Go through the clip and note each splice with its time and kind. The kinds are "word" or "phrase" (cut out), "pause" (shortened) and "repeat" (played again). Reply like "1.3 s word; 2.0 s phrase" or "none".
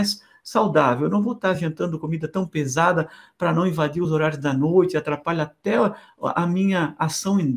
none